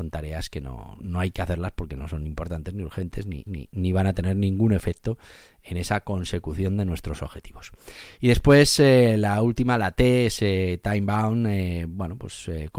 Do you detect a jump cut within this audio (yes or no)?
yes